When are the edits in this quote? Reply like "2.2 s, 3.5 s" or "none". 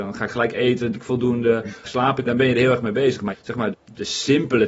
0.9 s, 1.8 s, 2.3 s, 3.3 s, 3.7 s

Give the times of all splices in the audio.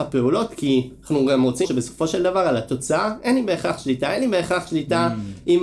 1.6 s

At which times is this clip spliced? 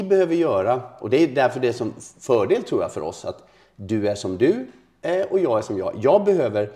none

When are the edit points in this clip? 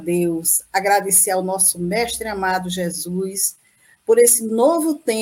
none

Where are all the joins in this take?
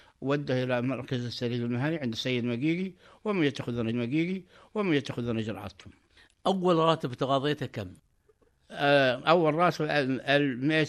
3.9 s

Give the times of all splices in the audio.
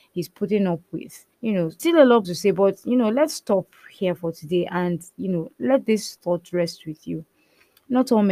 1.3 s, 1.8 s, 2.2 s

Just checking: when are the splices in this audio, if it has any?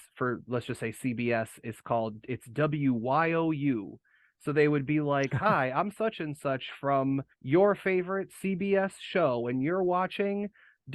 7.3 s

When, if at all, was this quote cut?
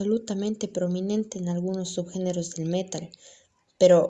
none

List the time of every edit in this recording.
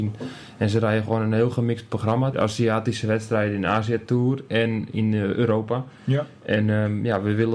2.3 s

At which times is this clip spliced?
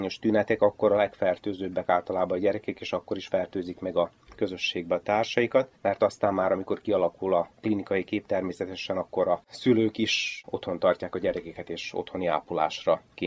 5.0 s

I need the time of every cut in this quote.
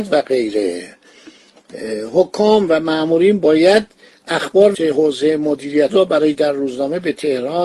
4.7 s, 5.9 s, 6.4 s

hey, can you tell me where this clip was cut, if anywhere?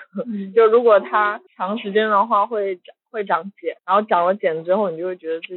1.5 s, 3.8 s

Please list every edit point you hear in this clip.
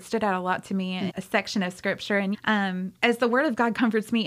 1.1 s, 2.3 s, 3.0 s

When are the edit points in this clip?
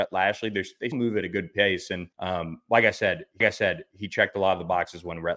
0.9 s, 2.1 s, 3.4 s

